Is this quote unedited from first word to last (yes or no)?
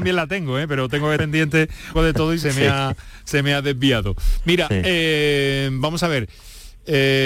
no